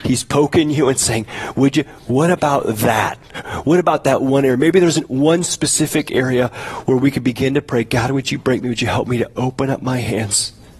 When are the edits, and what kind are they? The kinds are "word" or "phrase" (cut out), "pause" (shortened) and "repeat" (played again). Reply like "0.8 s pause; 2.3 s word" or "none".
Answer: 2.0 s pause

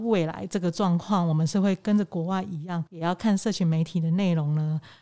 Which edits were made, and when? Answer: 2.9 s pause

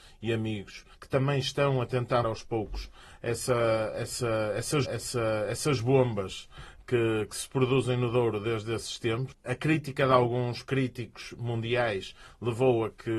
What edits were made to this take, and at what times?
0.9 s pause; 2.2 s word; 4.8 s repeat

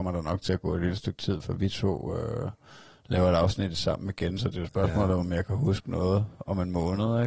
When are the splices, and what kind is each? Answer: none

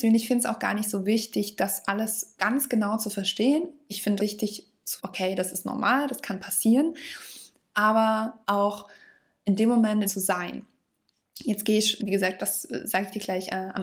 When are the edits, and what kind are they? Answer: 2.4 s word; 4.2 s word; 5.0 s word; 8.4 s pause; 10.1 s phrase; 12.0 s word

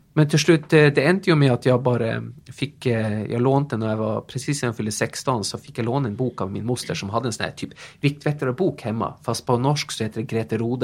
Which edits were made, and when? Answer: none

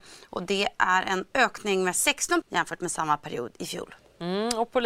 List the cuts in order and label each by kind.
2.4 s word

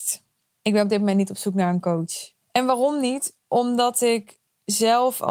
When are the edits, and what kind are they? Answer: 2.4 s pause

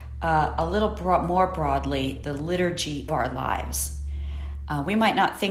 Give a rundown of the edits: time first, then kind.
2.2 s word; 3.1 s word

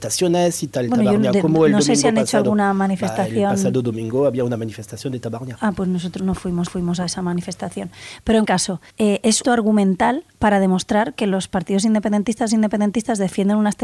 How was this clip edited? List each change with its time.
6.2 s word; 6.7 s repeat; 8.5 s word; 8.9 s pause; 9.4 s phrase; 12.5 s repeat

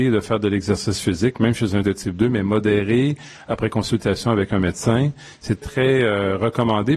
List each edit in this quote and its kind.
1.8 s word; 5.6 s word

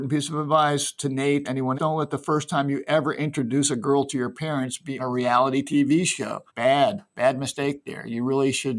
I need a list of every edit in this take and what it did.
1.4 s word; 1.8 s word; 5.0 s word; 6.5 s pause

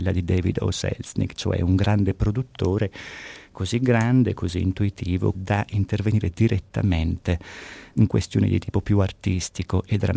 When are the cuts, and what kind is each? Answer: 5.3 s phrase

